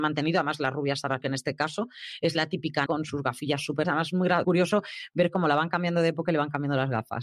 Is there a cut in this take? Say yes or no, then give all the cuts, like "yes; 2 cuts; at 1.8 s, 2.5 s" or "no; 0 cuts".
yes; 4 cuts; at 1.2 s, 2.9 s, 3.8 s, 4.4 s